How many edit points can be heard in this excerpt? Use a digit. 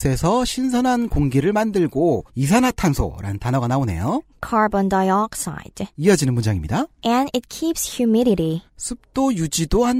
4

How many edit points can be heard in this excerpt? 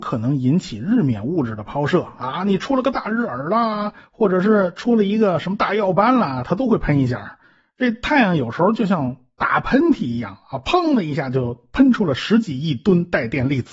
0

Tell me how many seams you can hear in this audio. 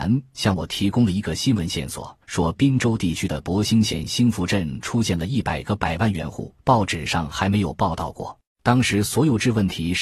3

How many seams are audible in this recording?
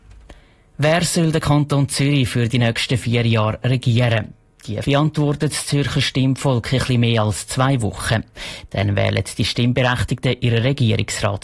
1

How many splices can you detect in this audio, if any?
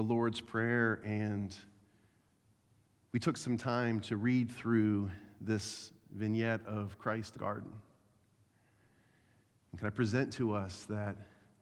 1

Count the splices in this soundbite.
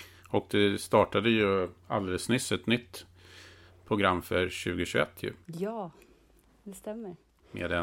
1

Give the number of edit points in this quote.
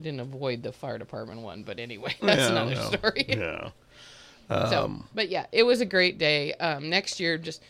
0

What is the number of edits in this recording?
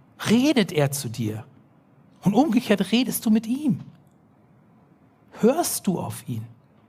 0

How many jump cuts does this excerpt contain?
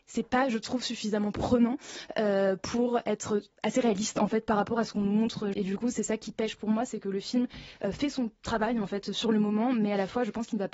2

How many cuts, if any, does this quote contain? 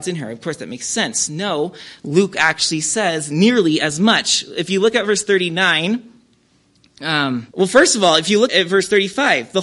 2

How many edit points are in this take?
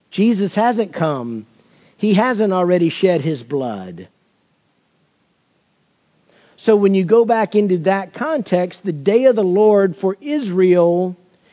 0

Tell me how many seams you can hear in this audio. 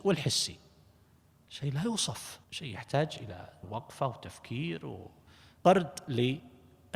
2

